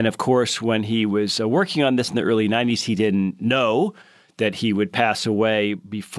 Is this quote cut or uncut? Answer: uncut